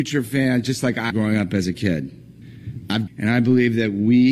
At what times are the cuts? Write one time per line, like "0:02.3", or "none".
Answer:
0:01.1
0:03.1